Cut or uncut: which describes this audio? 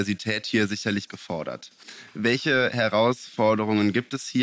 cut